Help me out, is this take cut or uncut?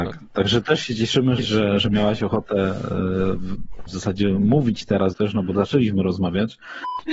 cut